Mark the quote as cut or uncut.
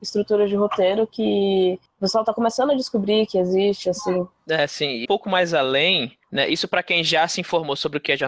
cut